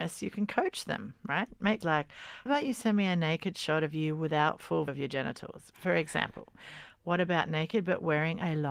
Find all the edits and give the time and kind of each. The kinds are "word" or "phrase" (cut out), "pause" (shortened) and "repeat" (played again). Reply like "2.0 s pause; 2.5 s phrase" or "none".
1.8 s word; 2.5 s word; 4.9 s word

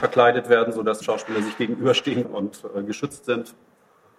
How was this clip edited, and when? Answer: 1.0 s word; 2.2 s word

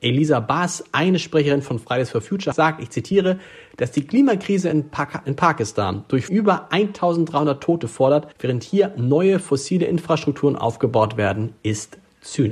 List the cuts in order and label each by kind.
2.5 s word; 6.3 s word; 8.3 s pause

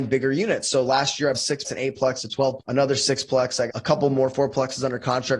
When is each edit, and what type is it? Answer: 1.3 s word; 1.6 s word; 2.6 s word; 3.7 s word

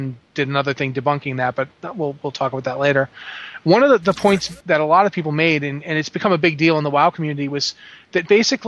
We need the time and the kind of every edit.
none

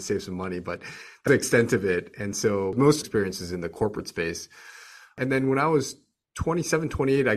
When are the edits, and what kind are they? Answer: 1.3 s phrase; 3.0 s phrase

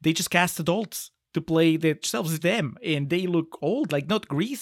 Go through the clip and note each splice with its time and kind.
2.0 s word; 2.4 s word

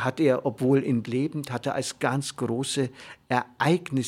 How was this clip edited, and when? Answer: 1.0 s word; 2.0 s word

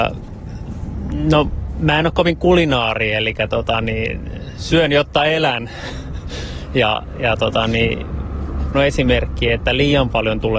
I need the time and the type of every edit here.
8.7 s phrase

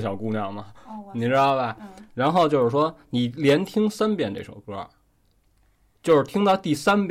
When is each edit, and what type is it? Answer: none

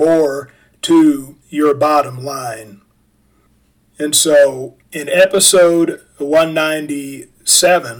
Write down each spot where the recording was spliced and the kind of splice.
1.4 s pause

